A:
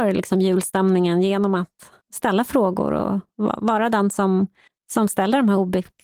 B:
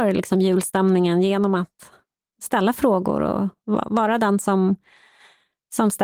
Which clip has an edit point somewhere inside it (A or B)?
A